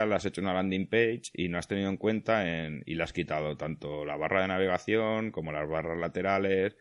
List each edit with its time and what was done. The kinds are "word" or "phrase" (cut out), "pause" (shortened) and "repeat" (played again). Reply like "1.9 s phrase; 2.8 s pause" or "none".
none